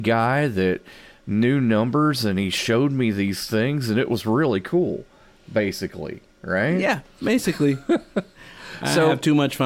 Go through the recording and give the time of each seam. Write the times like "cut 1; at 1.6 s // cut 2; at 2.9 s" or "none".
none